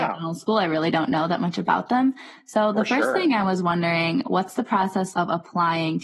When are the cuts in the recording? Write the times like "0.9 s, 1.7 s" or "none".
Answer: 5.1 s